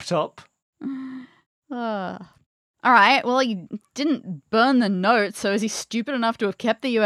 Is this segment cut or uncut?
uncut